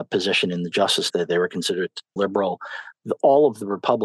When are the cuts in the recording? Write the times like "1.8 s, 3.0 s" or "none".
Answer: 1.1 s, 2.2 s